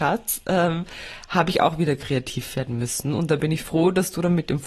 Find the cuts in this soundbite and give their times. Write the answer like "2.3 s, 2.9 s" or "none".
none